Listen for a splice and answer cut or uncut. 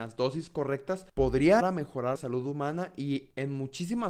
cut